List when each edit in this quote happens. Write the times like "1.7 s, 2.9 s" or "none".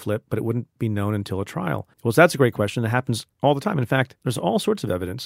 1.9 s, 3.3 s, 4.2 s